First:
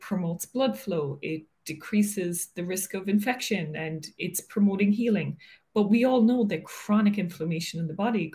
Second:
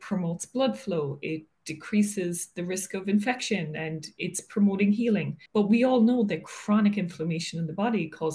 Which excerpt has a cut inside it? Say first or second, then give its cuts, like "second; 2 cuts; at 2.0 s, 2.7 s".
second; 1 cut; at 5.5 s